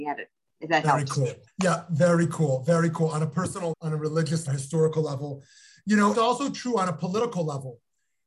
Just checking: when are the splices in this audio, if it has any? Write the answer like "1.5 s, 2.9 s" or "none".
1.5 s, 3.7 s, 4.5 s, 6.1 s